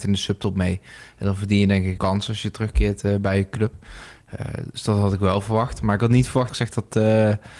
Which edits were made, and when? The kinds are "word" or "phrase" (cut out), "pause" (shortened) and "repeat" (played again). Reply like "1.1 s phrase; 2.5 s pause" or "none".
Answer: 2.0 s word; 6.5 s word